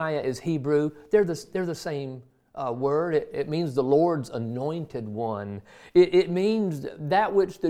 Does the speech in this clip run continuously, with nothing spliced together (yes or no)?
yes